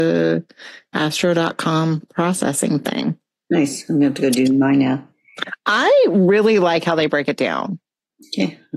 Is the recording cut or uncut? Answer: uncut